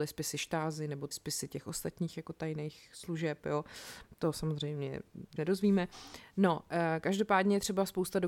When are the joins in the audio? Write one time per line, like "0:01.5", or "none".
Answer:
0:01.1
0:05.4